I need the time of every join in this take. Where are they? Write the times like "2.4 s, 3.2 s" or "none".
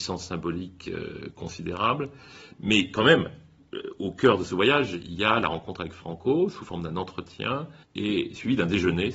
7.8 s